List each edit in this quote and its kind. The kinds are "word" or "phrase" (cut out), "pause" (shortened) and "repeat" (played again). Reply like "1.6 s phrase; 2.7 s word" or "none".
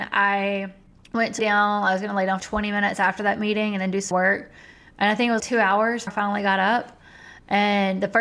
1.4 s word; 2.4 s word; 4.1 s word; 5.4 s word; 6.1 s word